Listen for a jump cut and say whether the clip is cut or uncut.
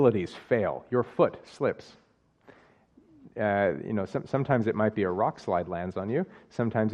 uncut